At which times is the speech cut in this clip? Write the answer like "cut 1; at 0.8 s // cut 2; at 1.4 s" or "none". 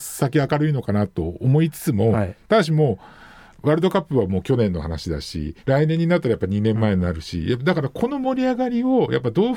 cut 1; at 5.6 s